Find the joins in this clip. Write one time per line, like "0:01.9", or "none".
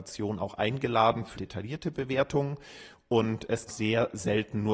0:01.3
0:03.7